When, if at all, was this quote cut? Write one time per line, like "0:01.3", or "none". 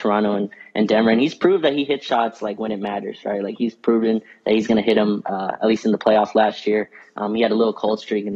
none